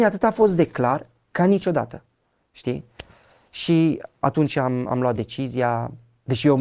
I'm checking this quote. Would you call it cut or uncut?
uncut